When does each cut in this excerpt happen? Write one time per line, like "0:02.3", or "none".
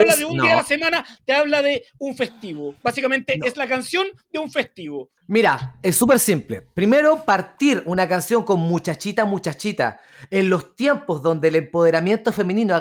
0:05.2